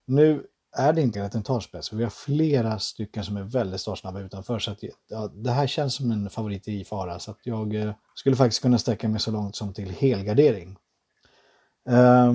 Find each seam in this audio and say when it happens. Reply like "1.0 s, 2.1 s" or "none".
1.1 s, 8.0 s